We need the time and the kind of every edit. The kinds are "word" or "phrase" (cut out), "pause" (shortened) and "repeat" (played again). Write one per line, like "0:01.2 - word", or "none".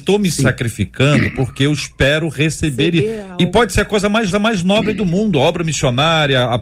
0:04.3 - repeat